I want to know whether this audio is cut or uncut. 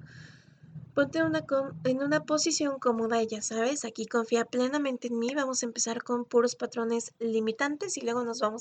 uncut